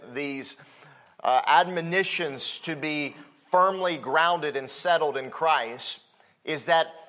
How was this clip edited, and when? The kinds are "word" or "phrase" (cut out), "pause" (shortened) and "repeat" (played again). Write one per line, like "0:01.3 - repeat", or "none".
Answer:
none